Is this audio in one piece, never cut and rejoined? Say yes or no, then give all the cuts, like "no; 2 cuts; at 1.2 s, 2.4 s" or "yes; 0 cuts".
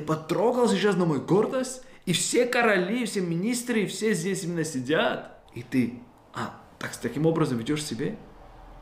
no; 1 cut; at 5.5 s